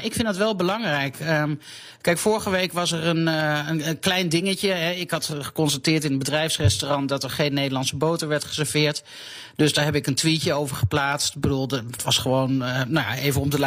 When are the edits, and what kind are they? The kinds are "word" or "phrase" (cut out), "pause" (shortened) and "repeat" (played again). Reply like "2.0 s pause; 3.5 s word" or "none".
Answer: 12.0 s word